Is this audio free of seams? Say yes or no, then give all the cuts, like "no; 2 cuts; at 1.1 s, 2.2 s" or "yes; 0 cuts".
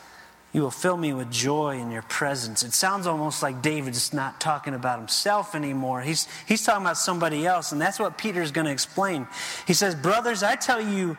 yes; 0 cuts